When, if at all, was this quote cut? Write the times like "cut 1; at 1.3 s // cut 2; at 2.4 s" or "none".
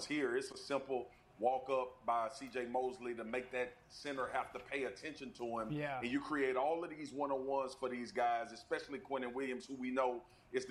none